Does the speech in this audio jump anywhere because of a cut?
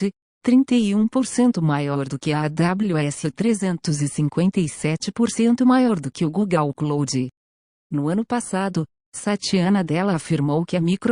no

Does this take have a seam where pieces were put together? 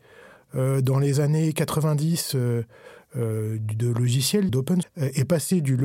yes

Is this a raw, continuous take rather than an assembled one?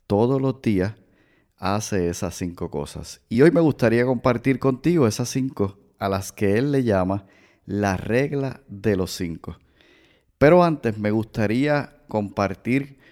yes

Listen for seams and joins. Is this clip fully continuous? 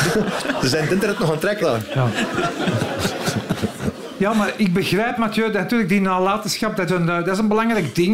no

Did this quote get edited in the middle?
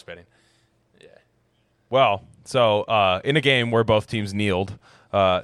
no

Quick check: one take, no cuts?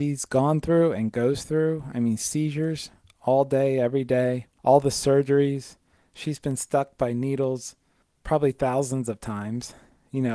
yes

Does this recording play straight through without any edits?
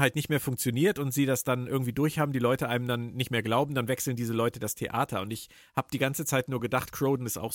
yes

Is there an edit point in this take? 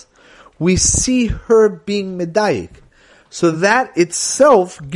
no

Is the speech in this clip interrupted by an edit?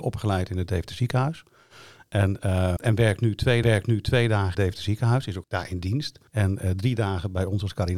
yes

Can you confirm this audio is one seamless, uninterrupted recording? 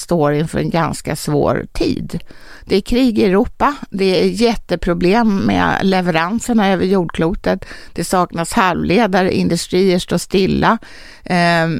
yes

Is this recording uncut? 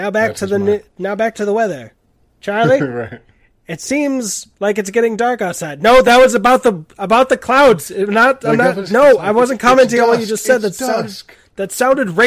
yes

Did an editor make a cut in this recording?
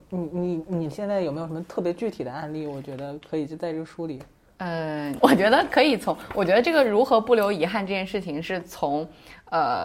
no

